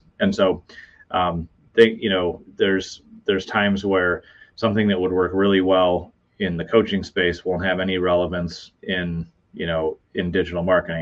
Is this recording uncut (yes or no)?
yes